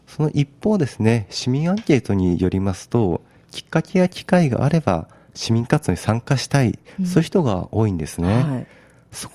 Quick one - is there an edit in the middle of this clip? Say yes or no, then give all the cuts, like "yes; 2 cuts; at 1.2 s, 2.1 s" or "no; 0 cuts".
no; 0 cuts